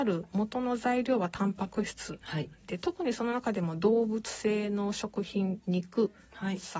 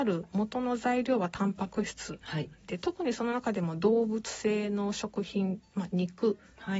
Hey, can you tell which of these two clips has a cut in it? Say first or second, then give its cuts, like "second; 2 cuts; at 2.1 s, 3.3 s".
first; 1 cut; at 5.6 s